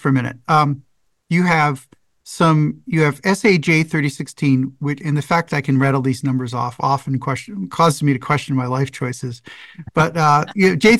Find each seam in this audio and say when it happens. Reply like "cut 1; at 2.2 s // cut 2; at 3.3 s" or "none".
none